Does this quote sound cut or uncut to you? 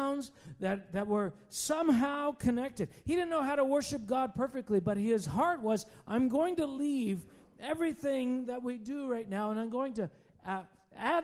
uncut